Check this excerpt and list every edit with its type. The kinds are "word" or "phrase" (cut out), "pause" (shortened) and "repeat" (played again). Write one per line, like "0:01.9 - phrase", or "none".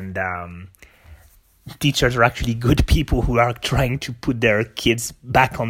none